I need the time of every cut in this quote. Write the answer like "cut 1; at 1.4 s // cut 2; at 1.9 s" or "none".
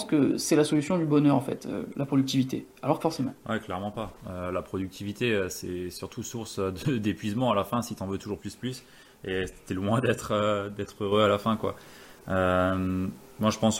cut 1; at 3.0 s // cut 2; at 8.4 s